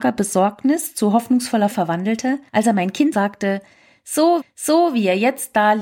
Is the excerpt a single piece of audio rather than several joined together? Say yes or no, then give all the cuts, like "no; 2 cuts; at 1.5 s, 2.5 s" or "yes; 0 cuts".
no; 4 cuts; at 1.7 s, 2.5 s, 3.1 s, 4.4 s